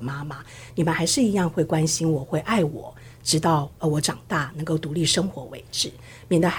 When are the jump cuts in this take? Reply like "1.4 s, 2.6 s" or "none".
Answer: none